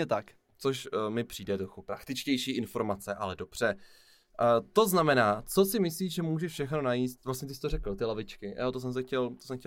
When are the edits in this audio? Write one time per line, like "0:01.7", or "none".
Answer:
none

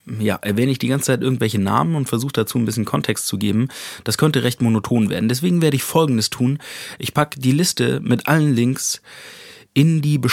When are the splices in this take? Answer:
none

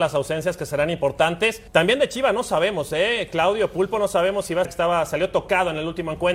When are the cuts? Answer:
0:01.7
0:04.6

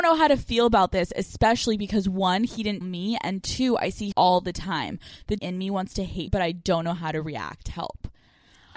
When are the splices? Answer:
0:02.8
0:04.1
0:05.4
0:06.3

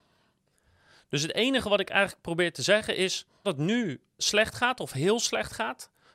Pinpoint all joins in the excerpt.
0:03.4
0:04.2

